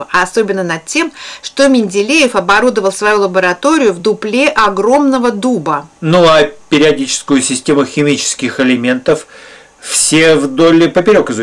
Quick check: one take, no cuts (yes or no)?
yes